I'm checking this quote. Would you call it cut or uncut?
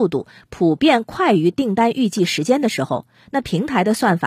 uncut